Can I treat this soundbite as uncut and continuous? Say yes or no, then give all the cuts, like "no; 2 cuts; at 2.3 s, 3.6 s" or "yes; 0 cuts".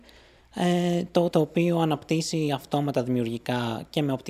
no; 1 cut; at 1.3 s